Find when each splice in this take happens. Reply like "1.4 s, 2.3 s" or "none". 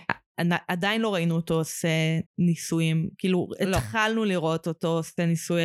2.3 s